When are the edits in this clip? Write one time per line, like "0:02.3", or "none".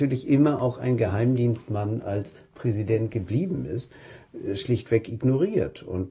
none

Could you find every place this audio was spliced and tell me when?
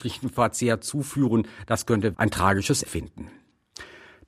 0:02.1
0:02.9

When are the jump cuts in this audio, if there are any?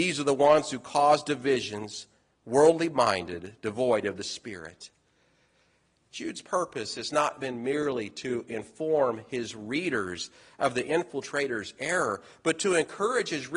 none

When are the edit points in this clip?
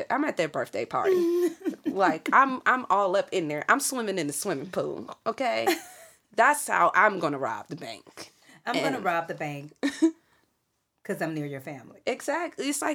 none

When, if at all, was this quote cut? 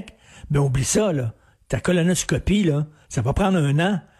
none

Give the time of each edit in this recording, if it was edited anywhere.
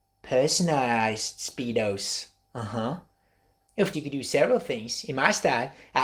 0:03.9

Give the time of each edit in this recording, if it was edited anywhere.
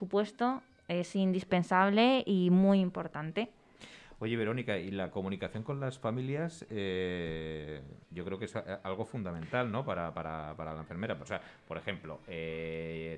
0:08.0

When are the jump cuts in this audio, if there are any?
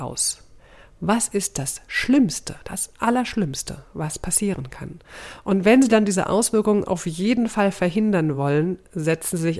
none

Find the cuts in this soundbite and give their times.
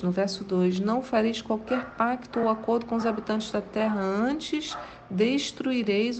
none

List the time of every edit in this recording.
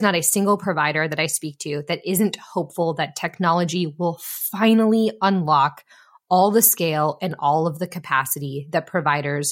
none

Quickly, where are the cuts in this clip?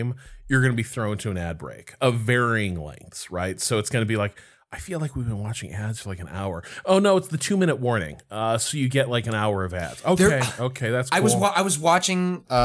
none

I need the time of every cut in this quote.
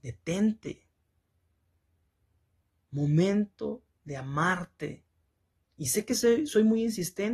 none

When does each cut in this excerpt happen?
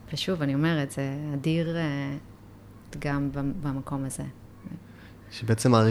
0:02.9

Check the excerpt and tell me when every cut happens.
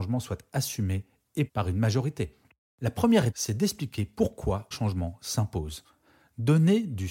0:01.5
0:03.3
0:04.7

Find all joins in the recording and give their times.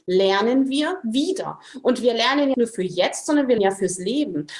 0:02.5
0:03.6

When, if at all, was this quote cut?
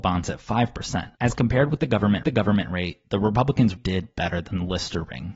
0:01.1
0:02.2
0:03.8

